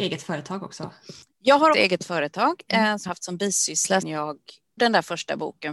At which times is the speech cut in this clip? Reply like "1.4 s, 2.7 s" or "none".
1.7 s, 3.1 s, 4.0 s, 4.8 s